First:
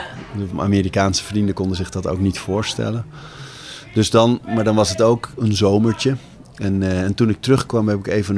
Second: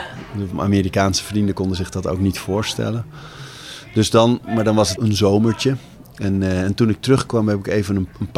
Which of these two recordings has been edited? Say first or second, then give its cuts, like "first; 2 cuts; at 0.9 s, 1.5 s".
second; 1 cut; at 5.0 s